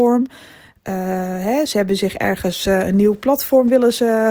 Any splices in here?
no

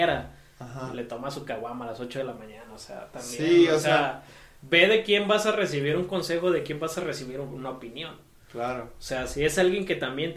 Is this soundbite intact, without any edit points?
yes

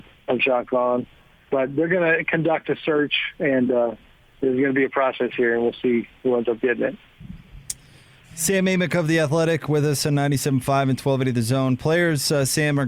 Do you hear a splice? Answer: no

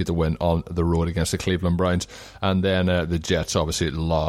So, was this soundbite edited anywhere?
no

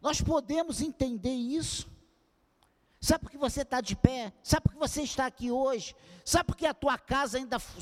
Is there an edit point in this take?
no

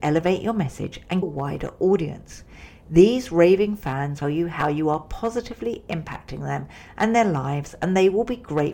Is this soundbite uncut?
no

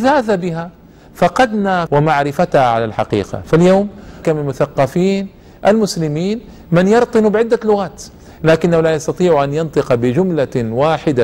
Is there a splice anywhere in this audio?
yes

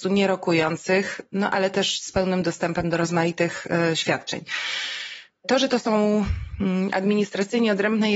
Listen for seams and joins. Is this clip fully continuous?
yes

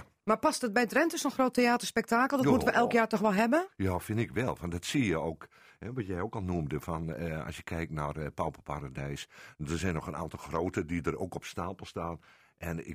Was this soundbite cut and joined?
no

